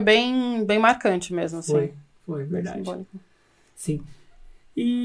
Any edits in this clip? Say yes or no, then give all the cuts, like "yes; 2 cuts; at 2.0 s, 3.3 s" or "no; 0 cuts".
no; 0 cuts